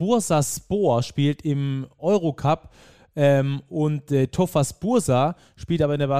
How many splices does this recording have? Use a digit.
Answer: 0